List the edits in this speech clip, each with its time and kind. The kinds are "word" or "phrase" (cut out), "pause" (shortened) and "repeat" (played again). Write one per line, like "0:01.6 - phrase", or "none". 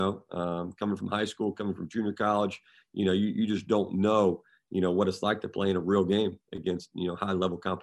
none

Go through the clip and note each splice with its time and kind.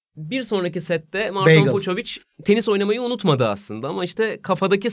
none

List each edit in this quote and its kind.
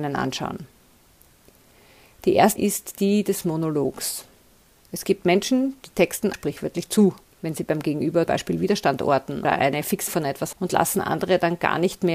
0:02.6 - word
0:06.3 - word
0:08.3 - word
0:09.4 - word
0:10.1 - word
0:10.5 - word

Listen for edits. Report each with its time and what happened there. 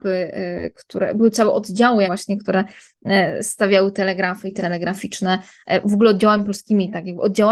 0:02.0 - word
0:04.6 - word

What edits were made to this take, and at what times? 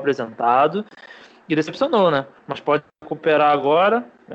none

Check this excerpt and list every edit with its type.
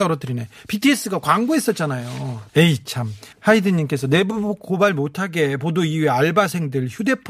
0:02.5 - pause
0:03.3 - pause

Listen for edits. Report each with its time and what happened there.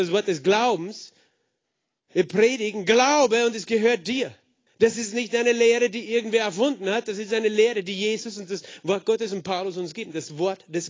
0:04.7 - pause

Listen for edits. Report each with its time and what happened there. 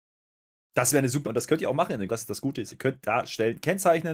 0:01.3 - word
0:02.1 - word
0:02.7 - word

